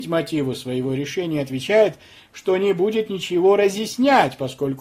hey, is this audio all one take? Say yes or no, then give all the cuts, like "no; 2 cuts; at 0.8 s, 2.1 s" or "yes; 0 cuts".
yes; 0 cuts